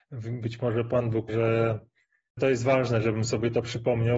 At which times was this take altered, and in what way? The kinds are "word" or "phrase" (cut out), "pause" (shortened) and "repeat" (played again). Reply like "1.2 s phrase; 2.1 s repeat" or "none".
1.3 s word; 2.4 s word